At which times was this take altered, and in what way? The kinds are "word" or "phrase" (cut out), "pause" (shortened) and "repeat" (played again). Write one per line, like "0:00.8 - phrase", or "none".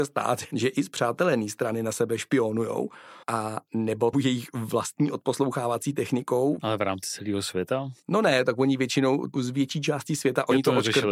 0:03.2 - pause
0:04.1 - phrase
0:08.0 - pause